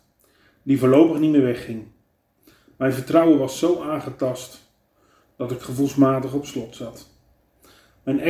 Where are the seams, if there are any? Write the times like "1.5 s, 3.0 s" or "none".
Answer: none